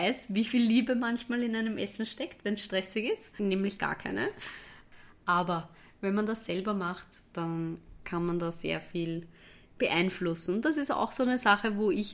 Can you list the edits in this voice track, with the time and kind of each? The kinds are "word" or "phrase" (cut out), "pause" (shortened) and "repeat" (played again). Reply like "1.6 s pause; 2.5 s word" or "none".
none

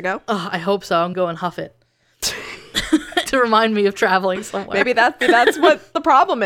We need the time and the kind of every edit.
1.1 s word; 3.3 s word; 5.2 s word

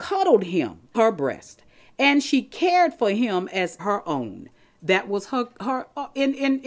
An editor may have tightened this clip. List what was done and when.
0.9 s word; 3.8 s phrase

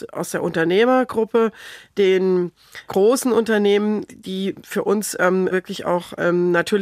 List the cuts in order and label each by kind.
2.9 s word; 4.1 s word; 5.5 s word

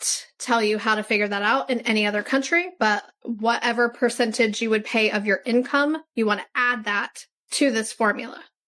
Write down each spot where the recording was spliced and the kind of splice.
none

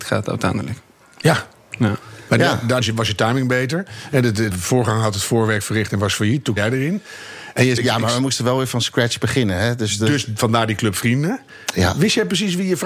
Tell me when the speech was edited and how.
2.8 s word; 4.5 s word; 6.6 s word; 7.8 s word

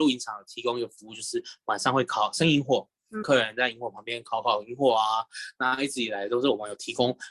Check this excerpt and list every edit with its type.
3.2 s phrase

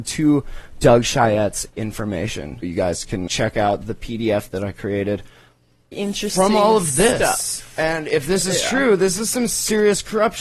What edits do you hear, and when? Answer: 2.6 s word; 3.3 s word; 5.9 s word

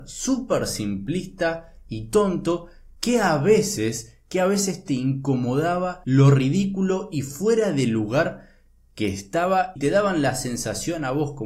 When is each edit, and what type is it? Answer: 6.0 s word

